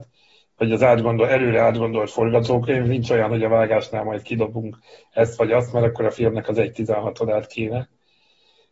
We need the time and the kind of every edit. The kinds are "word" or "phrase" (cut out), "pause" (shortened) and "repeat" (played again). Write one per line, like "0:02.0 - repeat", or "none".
none